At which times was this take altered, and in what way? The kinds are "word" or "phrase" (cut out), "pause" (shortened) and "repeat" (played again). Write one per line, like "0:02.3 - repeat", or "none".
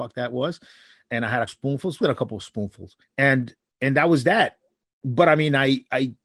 0:01.5 - word
0:02.0 - phrase
0:03.0 - pause